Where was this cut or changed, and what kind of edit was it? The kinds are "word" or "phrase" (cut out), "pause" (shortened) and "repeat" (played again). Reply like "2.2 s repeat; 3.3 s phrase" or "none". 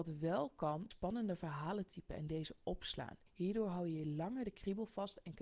0.9 s word; 3.3 s pause